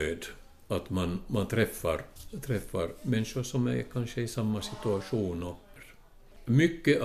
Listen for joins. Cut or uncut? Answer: uncut